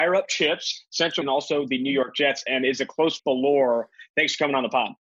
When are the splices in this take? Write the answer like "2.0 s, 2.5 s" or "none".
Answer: 1.2 s, 3.2 s